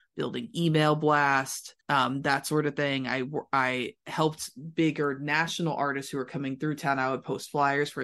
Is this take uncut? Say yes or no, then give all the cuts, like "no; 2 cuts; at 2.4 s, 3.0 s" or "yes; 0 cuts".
no; 1 cut; at 1.8 s